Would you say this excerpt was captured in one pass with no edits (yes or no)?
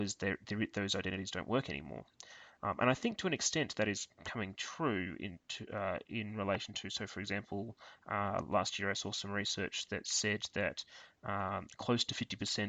yes